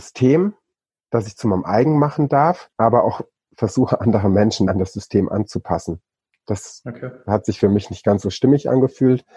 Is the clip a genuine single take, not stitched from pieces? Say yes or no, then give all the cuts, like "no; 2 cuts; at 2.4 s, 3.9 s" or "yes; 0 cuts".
no; 2 cuts; at 2.7 s, 4.7 s